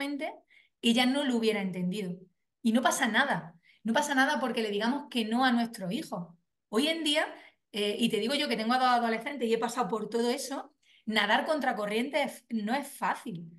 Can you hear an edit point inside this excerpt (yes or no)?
no